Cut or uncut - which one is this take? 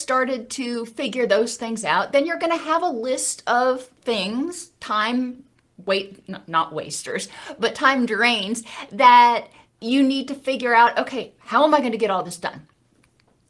cut